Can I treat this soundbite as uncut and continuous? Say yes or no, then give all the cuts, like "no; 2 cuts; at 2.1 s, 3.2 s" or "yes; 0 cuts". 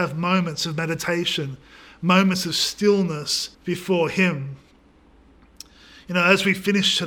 no; 1 cut; at 3.5 s